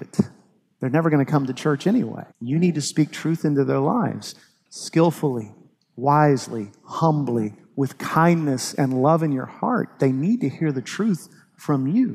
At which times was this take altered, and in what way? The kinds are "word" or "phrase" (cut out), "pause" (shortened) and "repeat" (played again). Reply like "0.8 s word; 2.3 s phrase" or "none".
2.3 s pause